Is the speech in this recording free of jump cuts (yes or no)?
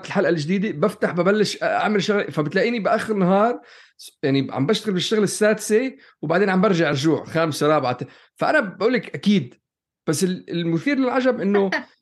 yes